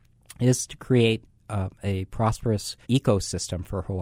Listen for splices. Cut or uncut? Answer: cut